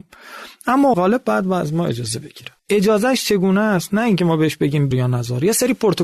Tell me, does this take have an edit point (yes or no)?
yes